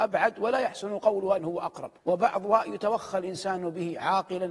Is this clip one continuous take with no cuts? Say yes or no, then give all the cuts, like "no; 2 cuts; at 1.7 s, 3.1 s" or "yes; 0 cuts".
no; 2 cuts; at 1.4 s, 2.0 s